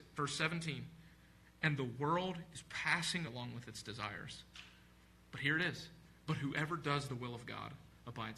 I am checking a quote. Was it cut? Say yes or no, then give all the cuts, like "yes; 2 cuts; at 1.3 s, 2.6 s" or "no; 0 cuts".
yes; 1 cut; at 3.3 s